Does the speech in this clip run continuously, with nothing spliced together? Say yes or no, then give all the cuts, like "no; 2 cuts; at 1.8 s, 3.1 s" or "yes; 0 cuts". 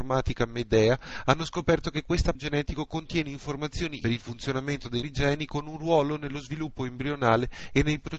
no; 3 cuts; at 2.3 s, 4.0 s, 5.0 s